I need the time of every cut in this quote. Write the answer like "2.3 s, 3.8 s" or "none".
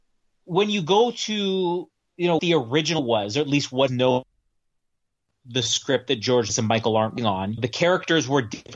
2.4 s, 3.0 s, 3.9 s, 6.5 s, 7.2 s, 7.6 s